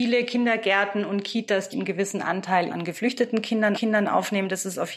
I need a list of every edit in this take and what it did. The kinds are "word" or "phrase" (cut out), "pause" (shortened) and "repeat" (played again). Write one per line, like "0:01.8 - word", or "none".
0:01.7 - word
0:02.7 - word
0:03.7 - repeat